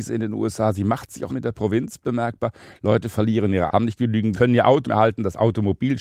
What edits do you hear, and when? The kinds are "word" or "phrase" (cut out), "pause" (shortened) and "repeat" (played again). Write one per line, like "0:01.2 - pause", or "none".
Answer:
0:01.3 - word
0:03.7 - word
0:04.3 - word
0:04.8 - word